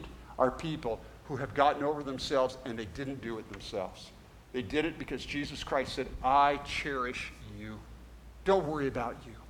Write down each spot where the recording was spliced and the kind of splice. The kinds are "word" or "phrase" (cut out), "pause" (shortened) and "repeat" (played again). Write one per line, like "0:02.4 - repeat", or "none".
0:04.4 - pause